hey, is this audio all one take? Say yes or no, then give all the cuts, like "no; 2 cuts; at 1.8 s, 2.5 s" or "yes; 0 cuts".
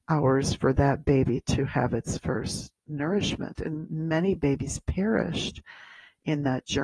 yes; 0 cuts